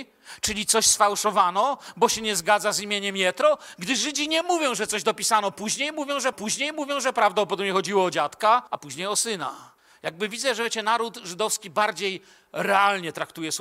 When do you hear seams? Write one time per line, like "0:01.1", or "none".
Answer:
0:06.3
0:08.7
0:09.8